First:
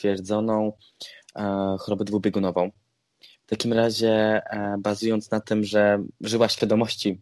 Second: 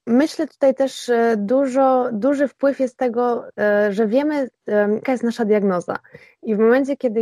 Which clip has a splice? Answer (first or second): second